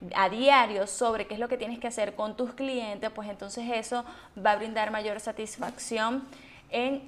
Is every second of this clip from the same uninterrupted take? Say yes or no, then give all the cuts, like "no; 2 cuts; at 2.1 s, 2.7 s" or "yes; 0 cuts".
yes; 0 cuts